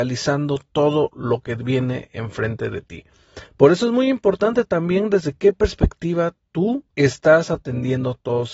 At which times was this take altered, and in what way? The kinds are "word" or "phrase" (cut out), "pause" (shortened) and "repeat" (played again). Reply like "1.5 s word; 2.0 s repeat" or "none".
6.9 s pause